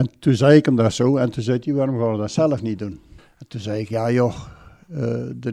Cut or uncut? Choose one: cut